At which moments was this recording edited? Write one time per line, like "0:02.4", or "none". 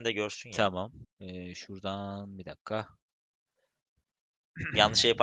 0:01.0